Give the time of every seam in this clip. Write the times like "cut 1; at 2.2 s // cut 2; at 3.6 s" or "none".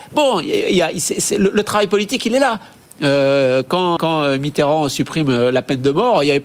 cut 1; at 4.0 s